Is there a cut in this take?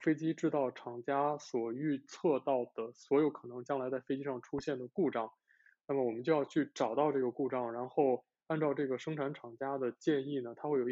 no; 0 cuts

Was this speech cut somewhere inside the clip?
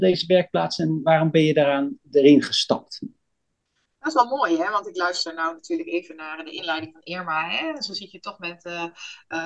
no; 0 cuts

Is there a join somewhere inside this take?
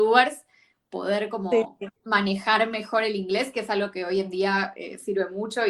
yes; 1 cut; at 2.0 s

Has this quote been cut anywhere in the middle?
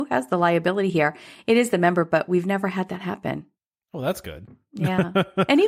no; 0 cuts

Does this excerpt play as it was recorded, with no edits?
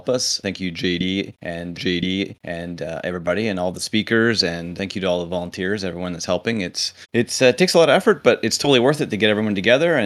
no; 3 cuts; at 1.8 s, 4.8 s, 7.0 s

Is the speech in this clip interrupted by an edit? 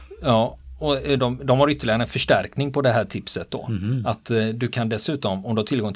no; 0 cuts

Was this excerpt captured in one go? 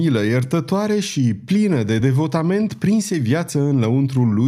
yes; 0 cuts

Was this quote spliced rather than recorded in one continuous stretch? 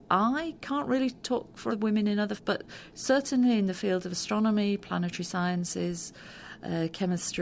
yes; 2 cuts; at 1.7 s, 2.4 s

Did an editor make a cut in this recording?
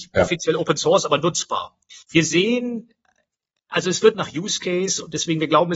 yes; 2 cuts; at 2.0 s, 4.1 s

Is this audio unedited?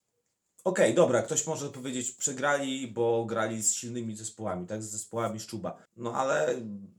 no; 1 cut; at 5.9 s

